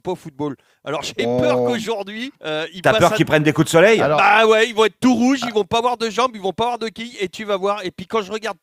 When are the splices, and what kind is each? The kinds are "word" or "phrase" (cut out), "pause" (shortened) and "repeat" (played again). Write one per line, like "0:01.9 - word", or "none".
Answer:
0:02.3 - pause